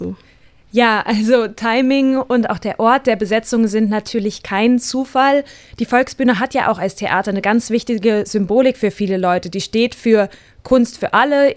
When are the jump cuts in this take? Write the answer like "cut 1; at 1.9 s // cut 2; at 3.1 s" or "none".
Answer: none